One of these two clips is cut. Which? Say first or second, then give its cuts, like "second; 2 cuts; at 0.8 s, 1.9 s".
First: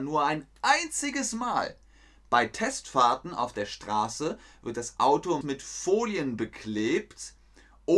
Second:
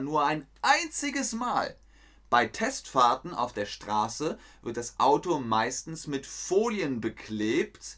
first; 1 cut; at 5.4 s